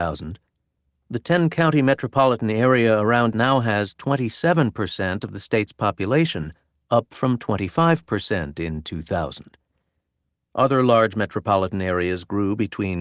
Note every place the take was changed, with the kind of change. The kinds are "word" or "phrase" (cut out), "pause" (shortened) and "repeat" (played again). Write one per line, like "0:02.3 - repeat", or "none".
0:03.3 - word